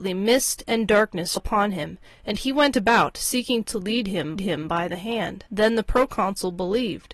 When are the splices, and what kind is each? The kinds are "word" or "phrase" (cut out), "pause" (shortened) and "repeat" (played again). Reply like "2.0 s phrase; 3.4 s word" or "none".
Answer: 1.4 s word; 3.6 s word; 4.4 s repeat; 5.5 s pause